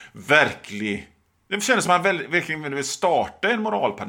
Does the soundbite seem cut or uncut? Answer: uncut